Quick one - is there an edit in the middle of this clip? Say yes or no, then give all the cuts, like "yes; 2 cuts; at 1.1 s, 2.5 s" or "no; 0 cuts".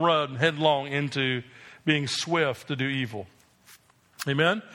no; 0 cuts